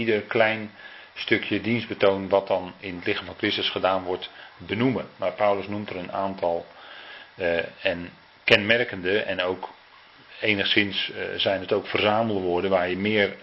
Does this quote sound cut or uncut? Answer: uncut